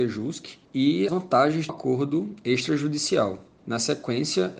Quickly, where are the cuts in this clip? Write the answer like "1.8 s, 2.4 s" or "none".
1.1 s, 1.7 s